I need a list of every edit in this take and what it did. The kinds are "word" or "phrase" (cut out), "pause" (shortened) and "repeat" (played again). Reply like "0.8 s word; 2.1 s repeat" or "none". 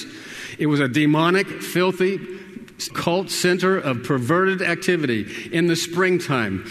2.9 s word